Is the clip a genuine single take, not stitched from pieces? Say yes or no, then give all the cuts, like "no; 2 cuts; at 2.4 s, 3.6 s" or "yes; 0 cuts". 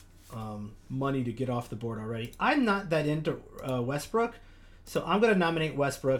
yes; 0 cuts